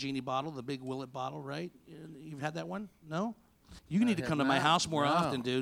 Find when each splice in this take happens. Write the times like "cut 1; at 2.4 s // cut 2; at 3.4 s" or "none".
cut 1; at 3.8 s